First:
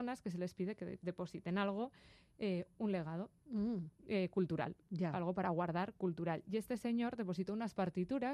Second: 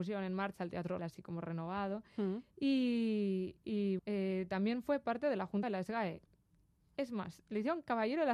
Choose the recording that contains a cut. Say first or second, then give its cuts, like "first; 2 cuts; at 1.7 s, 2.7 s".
second; 3 cuts; at 1.0 s, 4.0 s, 5.6 s